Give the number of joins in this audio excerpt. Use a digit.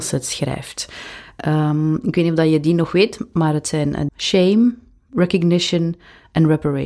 1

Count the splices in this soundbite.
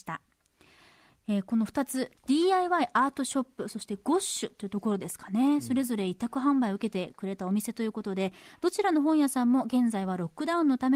1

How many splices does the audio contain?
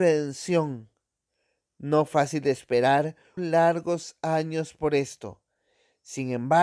2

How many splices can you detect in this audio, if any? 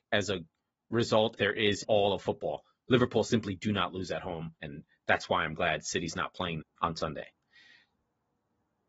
4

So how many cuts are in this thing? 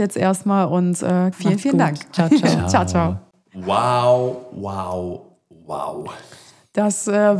1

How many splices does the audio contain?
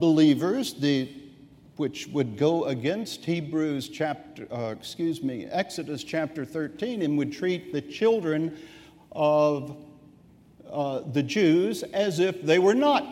0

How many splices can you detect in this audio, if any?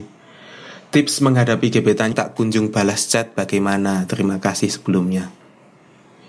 1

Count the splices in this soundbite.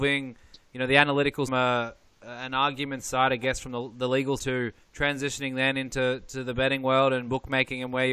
3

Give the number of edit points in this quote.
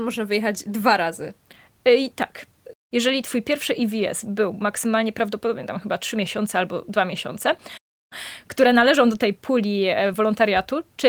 0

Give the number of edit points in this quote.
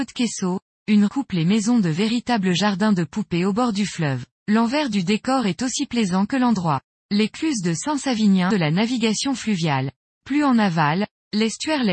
3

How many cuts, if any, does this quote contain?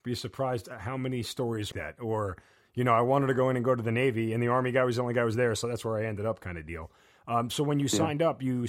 1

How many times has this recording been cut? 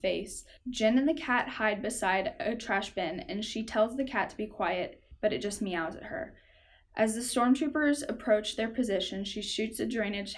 0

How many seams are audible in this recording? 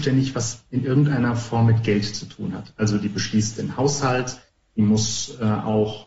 1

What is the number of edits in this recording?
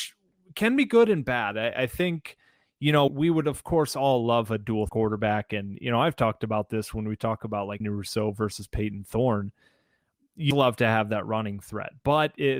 4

